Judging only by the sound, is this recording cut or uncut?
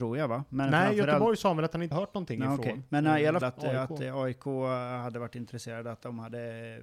cut